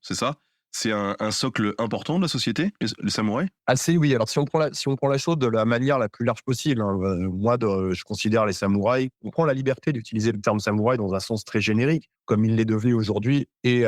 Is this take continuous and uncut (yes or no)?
no